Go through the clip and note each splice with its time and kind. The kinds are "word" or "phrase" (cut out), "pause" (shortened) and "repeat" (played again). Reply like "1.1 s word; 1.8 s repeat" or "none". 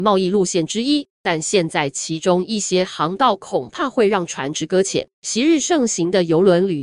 1.1 s pause; 5.1 s pause